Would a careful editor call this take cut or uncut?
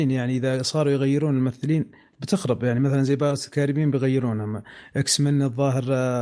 uncut